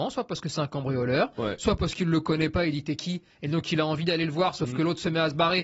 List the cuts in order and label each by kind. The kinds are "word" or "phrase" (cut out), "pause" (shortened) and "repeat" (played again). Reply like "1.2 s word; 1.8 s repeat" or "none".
none